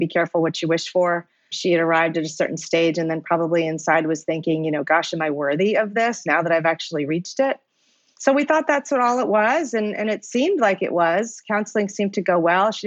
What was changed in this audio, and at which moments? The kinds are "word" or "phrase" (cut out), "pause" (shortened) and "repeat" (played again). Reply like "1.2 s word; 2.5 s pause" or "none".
none